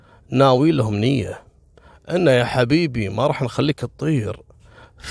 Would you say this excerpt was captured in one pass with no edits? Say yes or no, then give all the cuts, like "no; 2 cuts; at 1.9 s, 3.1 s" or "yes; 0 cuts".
yes; 0 cuts